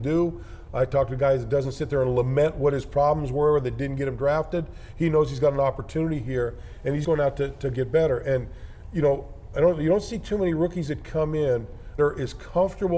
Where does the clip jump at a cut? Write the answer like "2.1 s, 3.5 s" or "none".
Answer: 7.0 s, 12.0 s

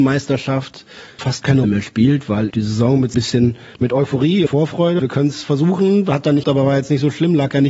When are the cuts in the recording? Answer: 1.2 s, 1.6 s, 2.5 s, 3.1 s, 4.5 s, 5.0 s, 6.4 s

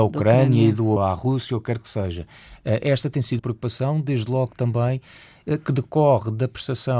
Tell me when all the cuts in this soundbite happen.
1.0 s, 3.4 s

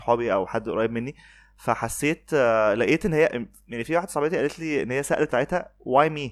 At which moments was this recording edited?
5.3 s

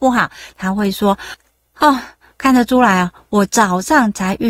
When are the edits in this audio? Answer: none

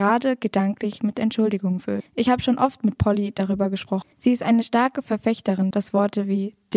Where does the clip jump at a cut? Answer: 2.1 s, 4.1 s, 5.7 s

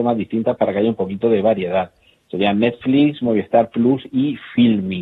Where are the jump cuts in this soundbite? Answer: none

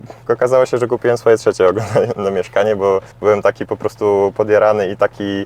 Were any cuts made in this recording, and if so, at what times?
3.1 s

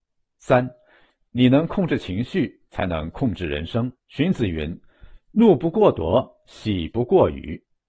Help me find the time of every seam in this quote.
4.0 s

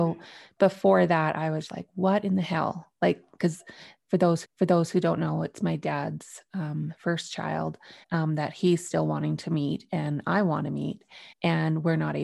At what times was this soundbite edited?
1.7 s, 4.4 s, 8.0 s, 11.3 s

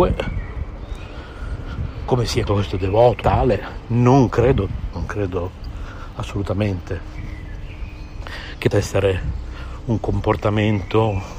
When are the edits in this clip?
2.5 s, 3.2 s, 4.9 s, 8.7 s

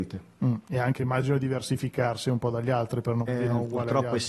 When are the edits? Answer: 3.3 s

